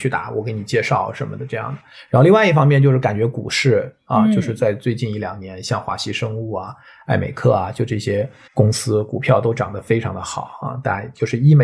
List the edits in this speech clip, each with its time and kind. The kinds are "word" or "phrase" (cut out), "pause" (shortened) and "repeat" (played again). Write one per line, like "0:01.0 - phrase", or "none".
0:08.5 - pause